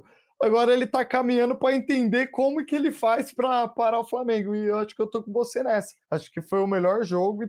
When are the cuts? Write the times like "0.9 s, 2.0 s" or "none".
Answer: 6.0 s